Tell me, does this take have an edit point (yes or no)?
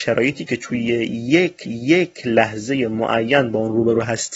yes